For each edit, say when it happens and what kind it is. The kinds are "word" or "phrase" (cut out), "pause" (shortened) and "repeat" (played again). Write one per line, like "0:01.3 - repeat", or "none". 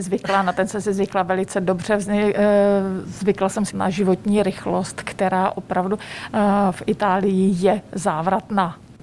0:03.7 - phrase

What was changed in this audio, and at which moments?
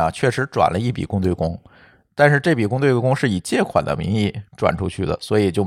none

